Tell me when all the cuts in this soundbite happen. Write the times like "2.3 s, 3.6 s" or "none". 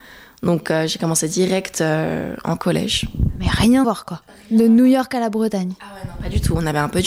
3.8 s